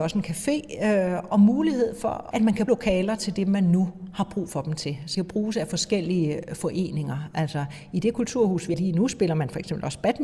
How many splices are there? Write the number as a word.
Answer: four